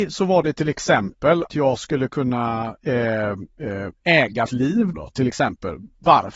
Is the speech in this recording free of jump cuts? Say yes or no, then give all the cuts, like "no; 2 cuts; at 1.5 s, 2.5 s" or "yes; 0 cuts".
no; 3 cuts; at 1.5 s, 4.5 s, 4.9 s